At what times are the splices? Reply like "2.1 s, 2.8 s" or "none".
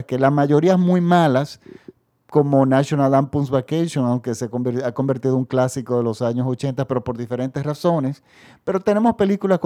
none